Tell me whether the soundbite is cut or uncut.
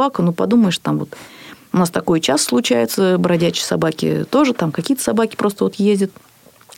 uncut